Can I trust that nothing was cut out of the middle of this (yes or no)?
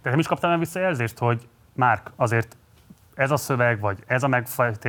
yes